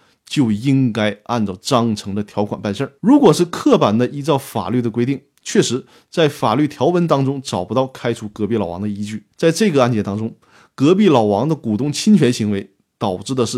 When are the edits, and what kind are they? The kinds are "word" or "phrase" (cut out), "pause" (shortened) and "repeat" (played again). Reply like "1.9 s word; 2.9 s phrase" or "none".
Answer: 3.0 s pause; 9.3 s pause

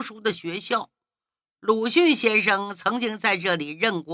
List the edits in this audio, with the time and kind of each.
none

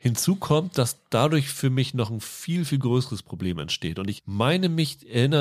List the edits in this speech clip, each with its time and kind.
none

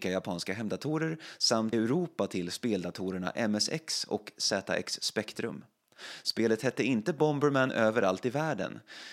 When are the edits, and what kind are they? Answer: 1.7 s word

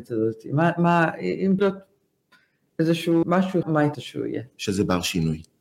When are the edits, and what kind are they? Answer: 1.6 s word; 3.2 s word; 3.6 s word; 3.9 s word

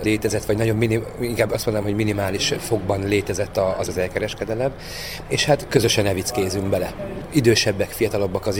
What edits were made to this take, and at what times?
3.9 s word; 5.7 s word

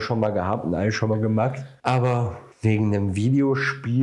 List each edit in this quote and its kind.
2.5 s pause

